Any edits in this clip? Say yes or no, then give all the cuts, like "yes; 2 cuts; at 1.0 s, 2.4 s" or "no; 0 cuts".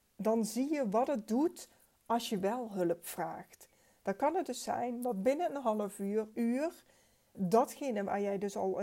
yes; 2 cuts; at 6.3 s, 7.3 s